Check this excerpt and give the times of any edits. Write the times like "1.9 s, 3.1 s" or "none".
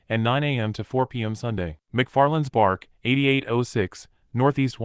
1.9 s